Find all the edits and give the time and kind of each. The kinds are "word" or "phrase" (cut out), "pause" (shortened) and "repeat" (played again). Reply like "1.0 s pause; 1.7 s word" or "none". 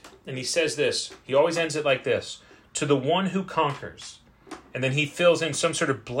none